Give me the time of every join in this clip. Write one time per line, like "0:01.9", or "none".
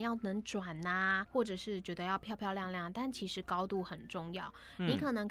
0:01.3